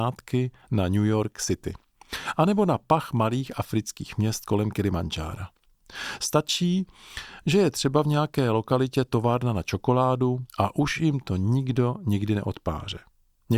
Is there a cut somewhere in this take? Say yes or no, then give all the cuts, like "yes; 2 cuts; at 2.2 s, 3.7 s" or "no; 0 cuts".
yes; 1 cut; at 10.5 s